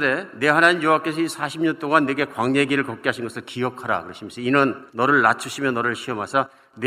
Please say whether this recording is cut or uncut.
cut